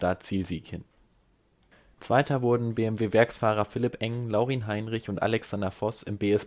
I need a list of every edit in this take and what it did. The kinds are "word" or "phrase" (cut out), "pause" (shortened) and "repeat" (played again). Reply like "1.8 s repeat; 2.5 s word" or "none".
none